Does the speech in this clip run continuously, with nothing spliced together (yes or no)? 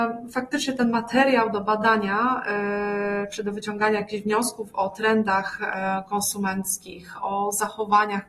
yes